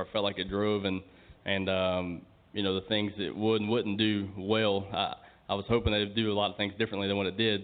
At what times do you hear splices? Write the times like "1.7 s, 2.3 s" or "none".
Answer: none